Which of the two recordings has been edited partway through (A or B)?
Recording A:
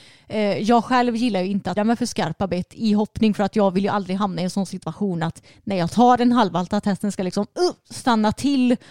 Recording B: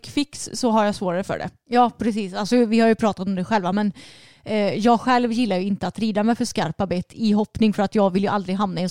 A